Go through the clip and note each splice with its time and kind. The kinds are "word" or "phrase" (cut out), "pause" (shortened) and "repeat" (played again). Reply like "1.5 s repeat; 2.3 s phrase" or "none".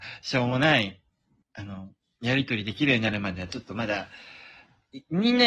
1.4 s word